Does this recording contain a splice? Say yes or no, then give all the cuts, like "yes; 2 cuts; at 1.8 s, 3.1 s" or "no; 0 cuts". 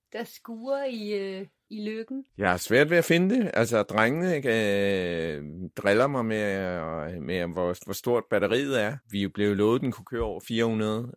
yes; 2 cuts; at 2.3 s, 9.0 s